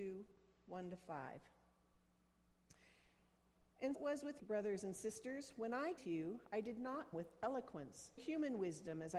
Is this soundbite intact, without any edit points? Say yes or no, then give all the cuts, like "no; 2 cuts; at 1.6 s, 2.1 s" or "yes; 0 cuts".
no; 5 cuts; at 3.9 s, 4.4 s, 6.0 s, 7.1 s, 8.2 s